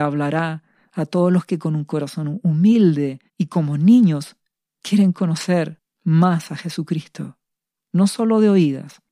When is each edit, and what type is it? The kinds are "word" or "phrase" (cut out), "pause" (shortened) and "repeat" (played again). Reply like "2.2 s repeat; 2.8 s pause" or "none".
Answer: 3.3 s pause

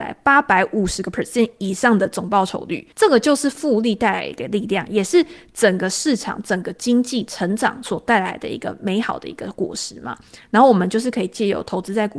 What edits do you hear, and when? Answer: 2.9 s pause

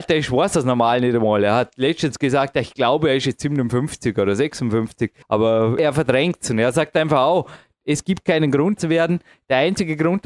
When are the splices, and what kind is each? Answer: 5.2 s pause; 8.8 s word

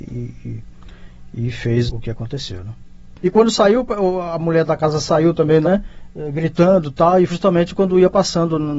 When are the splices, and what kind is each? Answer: 1.9 s word; 5.6 s word; 7.3 s word

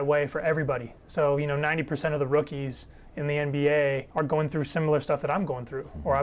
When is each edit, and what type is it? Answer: 4.1 s pause

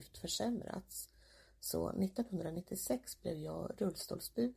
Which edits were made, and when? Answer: none

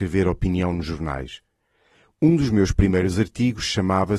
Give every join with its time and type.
none

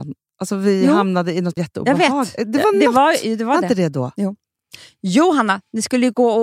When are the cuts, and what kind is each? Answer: 1.6 s phrase

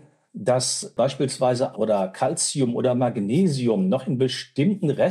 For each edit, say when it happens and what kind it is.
1.7 s word

